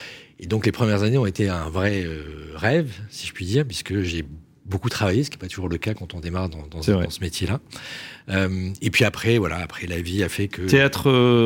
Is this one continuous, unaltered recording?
yes; 0 cuts

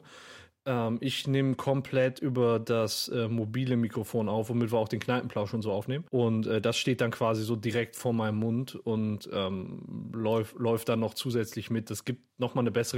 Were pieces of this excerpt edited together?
yes; 1 cut; at 6.1 s

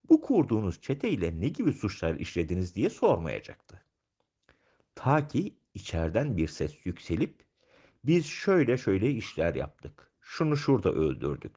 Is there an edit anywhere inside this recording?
no; 0 cuts

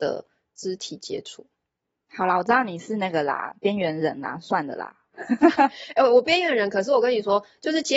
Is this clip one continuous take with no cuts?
yes; 0 cuts

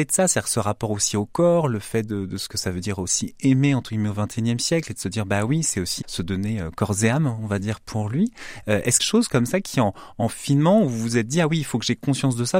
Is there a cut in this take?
yes; 2 cuts; at 6.0 s, 9.0 s

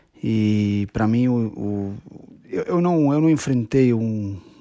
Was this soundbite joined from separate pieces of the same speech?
no; 0 cuts

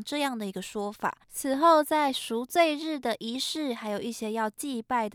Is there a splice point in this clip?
yes; 1 cut; at 1.2 s

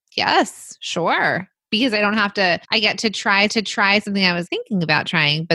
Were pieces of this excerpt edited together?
yes; 3 cuts; at 2.6 s, 3.5 s, 4.5 s

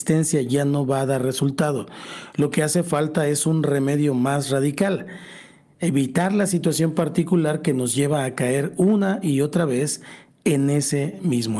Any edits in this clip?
no; 0 cuts

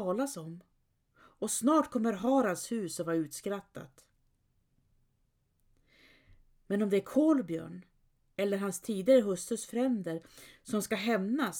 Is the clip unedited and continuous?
yes; 0 cuts

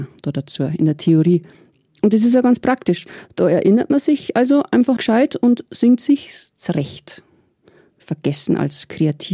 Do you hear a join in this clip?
yes; 1 cut; at 5.0 s

